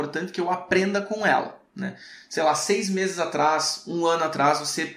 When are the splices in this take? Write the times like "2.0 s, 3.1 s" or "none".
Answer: 1.7 s